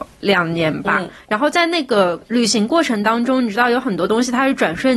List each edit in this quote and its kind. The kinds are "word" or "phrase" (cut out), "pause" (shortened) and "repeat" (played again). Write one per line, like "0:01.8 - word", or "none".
0:02.2 - pause